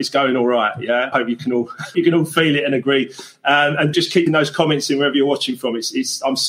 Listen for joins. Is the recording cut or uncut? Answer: cut